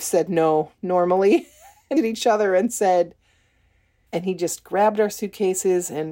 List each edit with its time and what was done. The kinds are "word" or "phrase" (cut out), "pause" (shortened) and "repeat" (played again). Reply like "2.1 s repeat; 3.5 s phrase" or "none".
2.0 s phrase; 4.1 s word